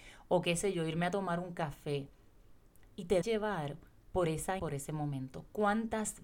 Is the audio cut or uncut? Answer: cut